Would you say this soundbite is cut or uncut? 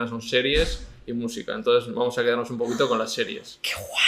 uncut